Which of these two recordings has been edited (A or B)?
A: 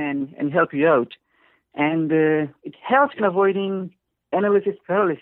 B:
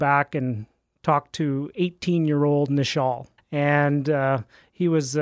B